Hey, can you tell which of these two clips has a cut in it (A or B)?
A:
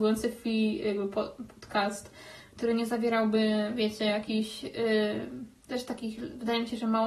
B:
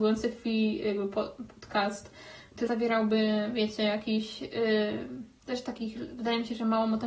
B